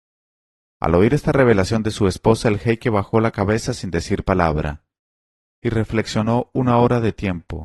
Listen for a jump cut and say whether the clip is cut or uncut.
uncut